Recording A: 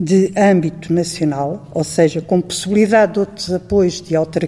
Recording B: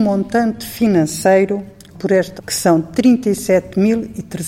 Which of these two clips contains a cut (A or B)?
B